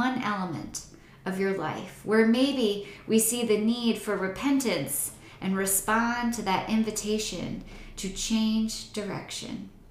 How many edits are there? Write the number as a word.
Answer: zero